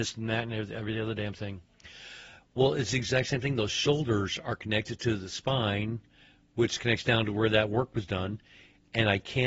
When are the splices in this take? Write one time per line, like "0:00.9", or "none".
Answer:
none